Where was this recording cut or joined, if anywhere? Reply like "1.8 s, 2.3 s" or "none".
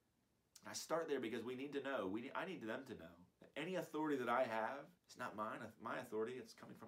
3.3 s, 5.0 s